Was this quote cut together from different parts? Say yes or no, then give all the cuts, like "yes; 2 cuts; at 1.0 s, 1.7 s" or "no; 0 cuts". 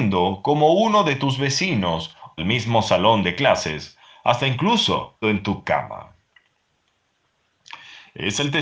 yes; 3 cuts; at 2.4 s, 5.2 s, 5.6 s